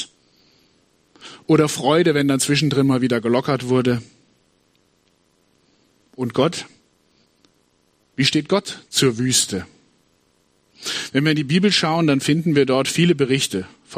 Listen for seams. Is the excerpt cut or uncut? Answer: uncut